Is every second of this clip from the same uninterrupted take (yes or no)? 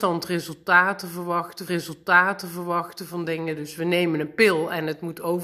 no